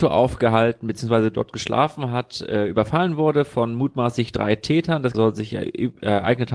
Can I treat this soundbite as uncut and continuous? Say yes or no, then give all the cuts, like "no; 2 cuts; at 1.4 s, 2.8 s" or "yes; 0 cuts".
no; 1 cut; at 5.1 s